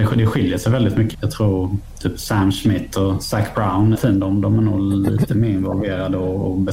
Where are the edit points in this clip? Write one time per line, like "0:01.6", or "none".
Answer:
0:01.1
0:03.9